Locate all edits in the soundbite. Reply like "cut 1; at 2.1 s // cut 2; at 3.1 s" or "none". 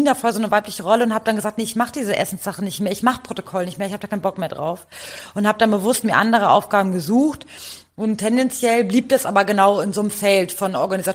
none